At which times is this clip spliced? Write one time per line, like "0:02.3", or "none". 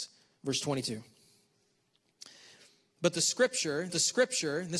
0:03.9